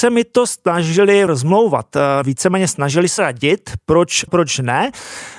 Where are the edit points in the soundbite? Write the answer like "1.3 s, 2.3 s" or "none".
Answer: 1.3 s, 2.2 s, 3.2 s, 4.3 s